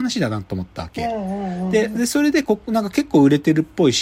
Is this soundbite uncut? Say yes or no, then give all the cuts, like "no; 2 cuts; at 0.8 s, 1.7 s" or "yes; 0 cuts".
yes; 0 cuts